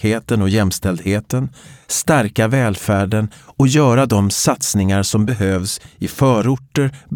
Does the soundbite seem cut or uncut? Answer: uncut